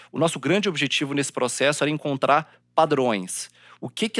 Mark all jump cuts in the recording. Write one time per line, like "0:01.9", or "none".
none

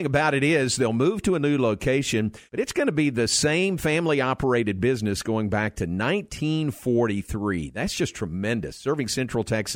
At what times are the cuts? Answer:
0:02.5

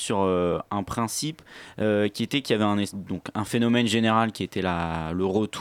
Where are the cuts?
none

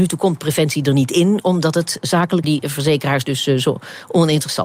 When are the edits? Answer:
0:02.4

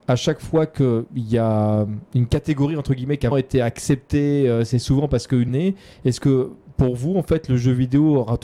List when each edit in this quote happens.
0:02.1
0:03.3
0:05.5

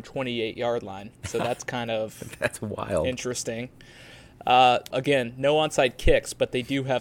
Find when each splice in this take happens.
0:01.1
0:04.9

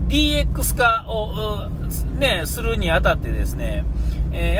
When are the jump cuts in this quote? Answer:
none

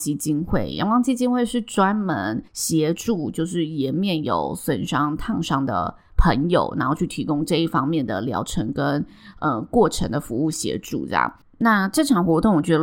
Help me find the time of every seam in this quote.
0:02.5
0:11.4

